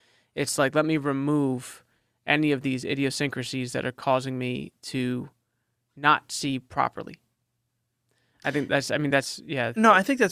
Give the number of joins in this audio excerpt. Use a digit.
0